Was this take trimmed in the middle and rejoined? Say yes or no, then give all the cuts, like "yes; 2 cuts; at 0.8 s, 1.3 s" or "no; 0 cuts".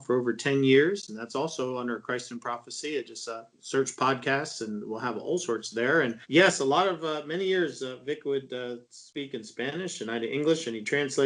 yes; 3 cuts; at 3.5 s, 6.2 s, 8.8 s